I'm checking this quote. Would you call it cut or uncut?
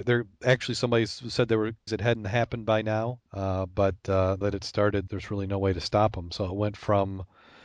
cut